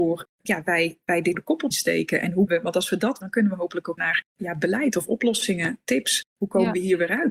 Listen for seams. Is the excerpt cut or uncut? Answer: cut